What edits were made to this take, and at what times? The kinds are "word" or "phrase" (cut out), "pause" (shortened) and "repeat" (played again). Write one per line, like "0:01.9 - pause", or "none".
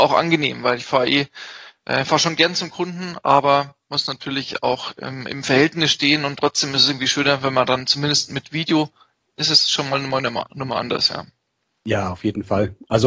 none